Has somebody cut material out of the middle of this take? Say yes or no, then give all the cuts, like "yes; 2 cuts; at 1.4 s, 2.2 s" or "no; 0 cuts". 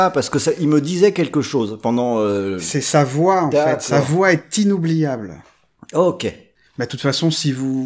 no; 0 cuts